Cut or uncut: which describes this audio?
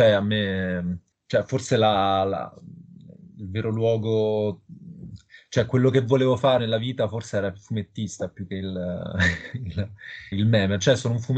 cut